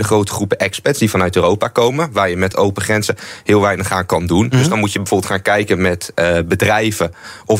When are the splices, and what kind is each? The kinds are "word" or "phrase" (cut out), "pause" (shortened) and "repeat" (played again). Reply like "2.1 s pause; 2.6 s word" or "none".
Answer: none